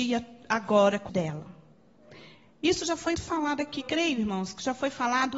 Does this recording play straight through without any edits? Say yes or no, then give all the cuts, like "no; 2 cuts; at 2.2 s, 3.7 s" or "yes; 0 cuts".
no; 3 cuts; at 1.1 s, 3.1 s, 3.8 s